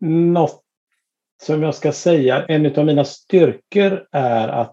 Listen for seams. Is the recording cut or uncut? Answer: cut